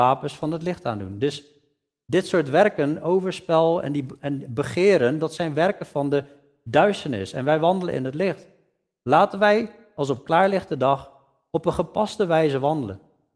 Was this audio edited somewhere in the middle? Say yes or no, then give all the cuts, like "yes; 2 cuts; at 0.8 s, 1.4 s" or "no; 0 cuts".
no; 0 cuts